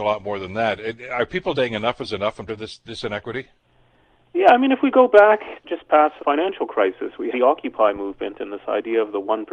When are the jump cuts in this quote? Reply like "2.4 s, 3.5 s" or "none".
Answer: 1.5 s, 2.5 s, 5.6 s, 6.2 s, 7.3 s